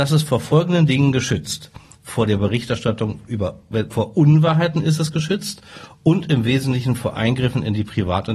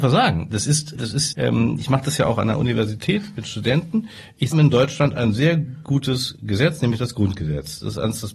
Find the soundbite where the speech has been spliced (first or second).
second